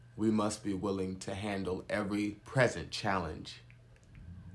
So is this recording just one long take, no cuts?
no; 1 cut; at 2.4 s

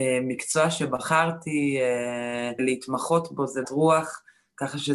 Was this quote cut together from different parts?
yes; 2 cuts; at 2.6 s, 3.6 s

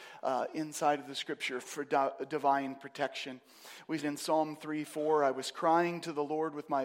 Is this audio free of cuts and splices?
no; 2 cuts; at 1.6 s, 4.0 s

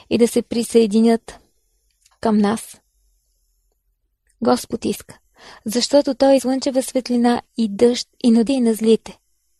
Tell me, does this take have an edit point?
yes; 3 cuts; at 6.4 s, 7.5 s, 8.5 s

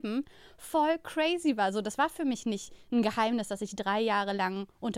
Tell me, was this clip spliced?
no; 0 cuts

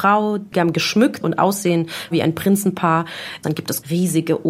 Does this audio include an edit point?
yes; 1 cut; at 1.2 s

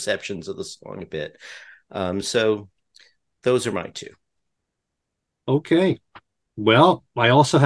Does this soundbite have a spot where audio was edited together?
no; 0 cuts

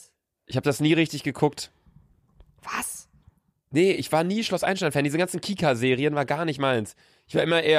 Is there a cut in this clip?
no; 0 cuts

